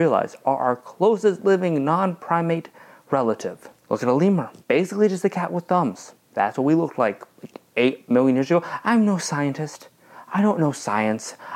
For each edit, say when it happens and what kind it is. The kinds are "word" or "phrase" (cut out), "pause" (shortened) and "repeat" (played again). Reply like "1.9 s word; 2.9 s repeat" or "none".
3.8 s pause; 4.6 s pause; 6.2 s pause

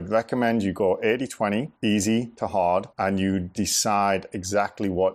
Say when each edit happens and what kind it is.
1.8 s pause; 2.9 s pause

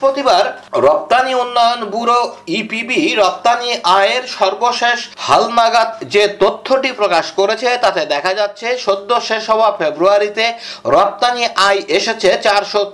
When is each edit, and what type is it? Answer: none

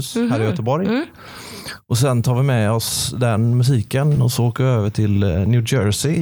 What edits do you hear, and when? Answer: none

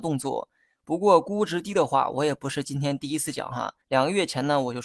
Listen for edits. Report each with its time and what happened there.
3.8 s pause

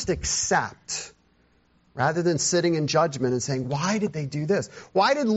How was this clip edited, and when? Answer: none

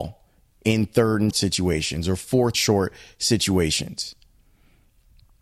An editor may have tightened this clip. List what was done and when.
1.3 s word; 2.5 s word

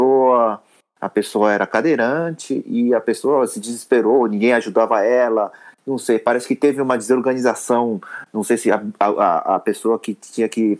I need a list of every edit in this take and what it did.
none

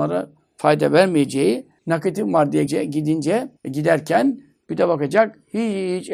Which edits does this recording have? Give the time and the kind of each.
1.8 s pause; 2.7 s word; 3.6 s pause

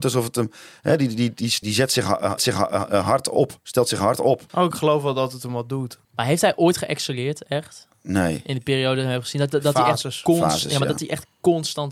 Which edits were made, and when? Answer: 1.6 s word; 2.4 s repeat; 4.5 s pause; 6.0 s pause

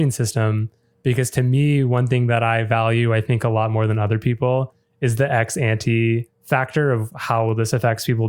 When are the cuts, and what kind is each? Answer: 6.3 s pause

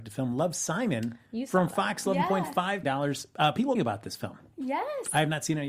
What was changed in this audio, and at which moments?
1.3 s pause; 2.8 s word; 3.8 s phrase

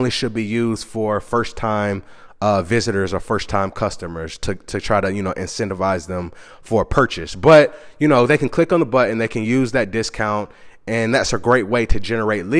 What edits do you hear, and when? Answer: none

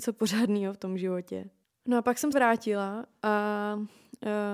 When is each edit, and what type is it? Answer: 1.6 s pause; 2.3 s word

